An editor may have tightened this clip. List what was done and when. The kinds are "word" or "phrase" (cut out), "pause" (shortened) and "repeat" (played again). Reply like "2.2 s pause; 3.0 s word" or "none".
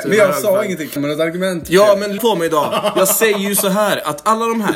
1.0 s phrase; 2.2 s word